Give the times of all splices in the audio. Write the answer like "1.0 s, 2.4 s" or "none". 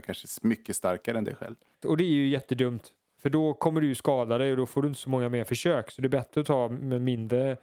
none